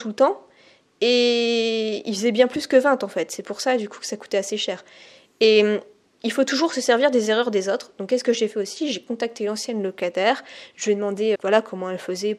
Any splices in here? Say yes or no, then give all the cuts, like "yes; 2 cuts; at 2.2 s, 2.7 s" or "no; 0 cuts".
yes; 1 cut; at 11.4 s